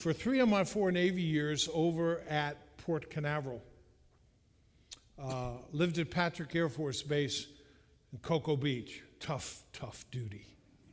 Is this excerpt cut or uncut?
uncut